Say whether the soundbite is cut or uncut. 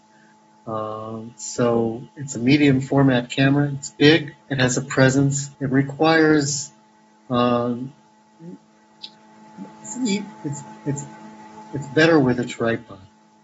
cut